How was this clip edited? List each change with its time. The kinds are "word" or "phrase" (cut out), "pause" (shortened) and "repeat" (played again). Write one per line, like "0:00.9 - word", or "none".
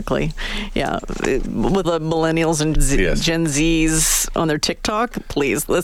0:01.8 - word
0:02.7 - word